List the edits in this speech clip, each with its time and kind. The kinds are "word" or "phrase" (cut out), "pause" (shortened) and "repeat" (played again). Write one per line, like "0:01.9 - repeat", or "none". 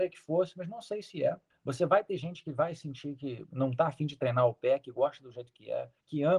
none

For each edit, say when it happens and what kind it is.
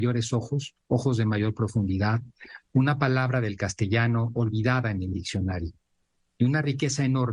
none

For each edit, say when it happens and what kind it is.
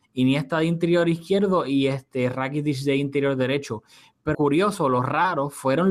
0:04.3 - word

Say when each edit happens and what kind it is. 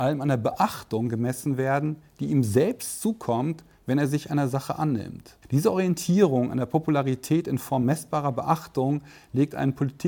0:05.4 - pause

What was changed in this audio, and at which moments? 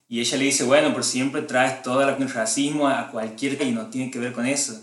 0:02.2 - word
0:03.6 - word

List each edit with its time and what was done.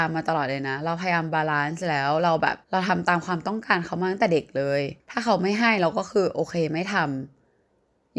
0:02.6 - pause
0:05.0 - pause

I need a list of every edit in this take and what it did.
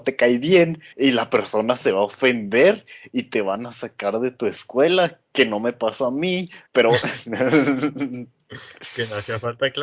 0:00.9 - pause
0:06.7 - pause

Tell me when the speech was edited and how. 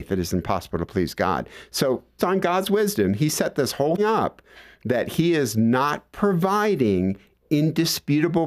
0:02.2 - word
0:04.0 - word

